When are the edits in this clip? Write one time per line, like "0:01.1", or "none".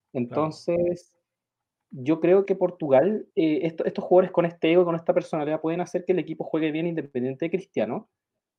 0:02.5
0:03.3

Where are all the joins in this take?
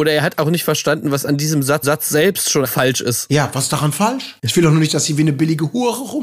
0:01.8
0:02.6
0:04.4

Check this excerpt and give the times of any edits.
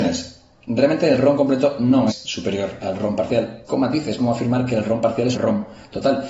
0:02.1
0:02.8
0:03.7
0:04.2
0:05.3

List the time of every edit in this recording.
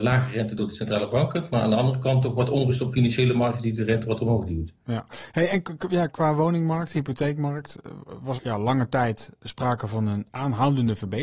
0:06.1
0:08.4

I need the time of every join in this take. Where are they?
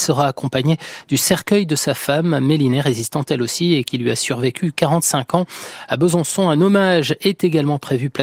none

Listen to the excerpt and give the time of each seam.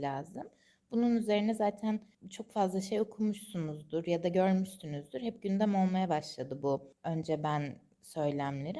none

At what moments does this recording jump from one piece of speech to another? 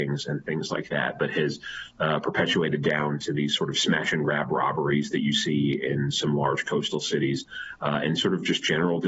none

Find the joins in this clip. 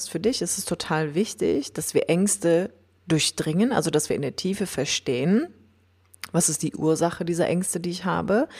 none

